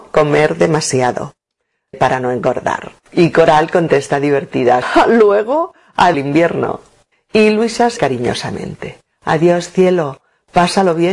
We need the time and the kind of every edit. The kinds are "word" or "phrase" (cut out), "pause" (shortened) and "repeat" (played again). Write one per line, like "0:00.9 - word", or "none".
0:01.9 - word
0:03.0 - pause
0:04.8 - word
0:06.1 - phrase
0:07.1 - pause
0:08.0 - word

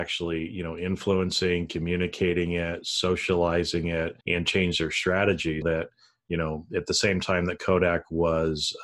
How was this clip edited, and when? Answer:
0:04.2 - pause
0:05.6 - word

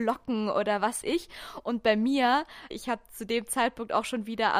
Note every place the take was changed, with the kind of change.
0:01.0 - word
0:02.7 - phrase

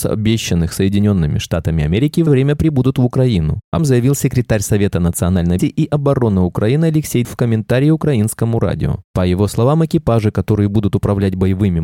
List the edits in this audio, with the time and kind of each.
0:02.3 - word
0:03.8 - word
0:05.6 - word
0:07.2 - word

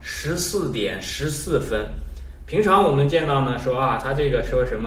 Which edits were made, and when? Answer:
none

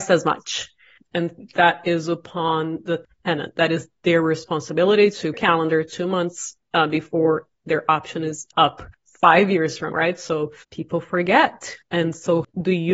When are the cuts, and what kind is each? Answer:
0:05.3 - phrase
0:06.6 - pause
0:08.9 - pause
0:09.9 - word
0:10.6 - pause

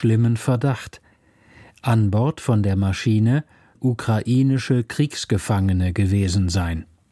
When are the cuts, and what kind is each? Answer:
0:03.7 - word

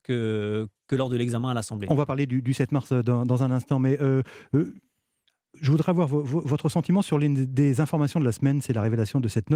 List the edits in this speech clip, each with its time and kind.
none

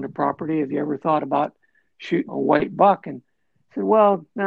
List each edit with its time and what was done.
0:02.3 - word

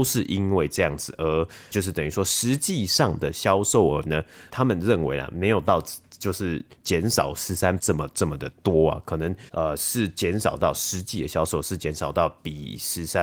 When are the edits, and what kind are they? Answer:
0:01.7 - phrase
0:04.5 - phrase
0:07.8 - word
0:09.5 - pause

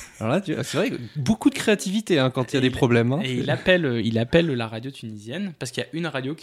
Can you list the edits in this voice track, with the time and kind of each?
none

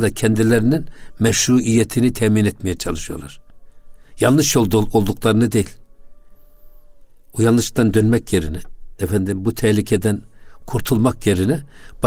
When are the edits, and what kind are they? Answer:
none

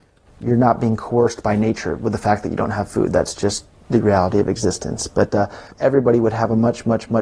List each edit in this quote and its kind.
0:05.7 - pause

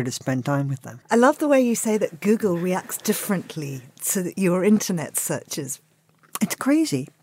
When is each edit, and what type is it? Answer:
0:01.0 - pause

